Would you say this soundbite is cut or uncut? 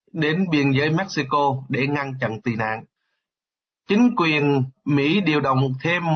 uncut